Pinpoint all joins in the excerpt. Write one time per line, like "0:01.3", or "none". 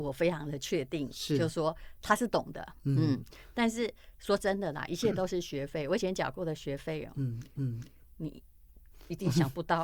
0:07.5